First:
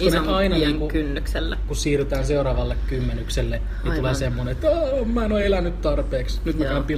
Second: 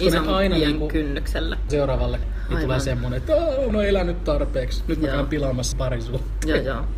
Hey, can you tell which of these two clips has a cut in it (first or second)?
second